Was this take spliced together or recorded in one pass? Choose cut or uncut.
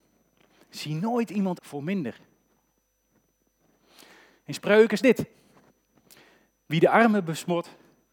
cut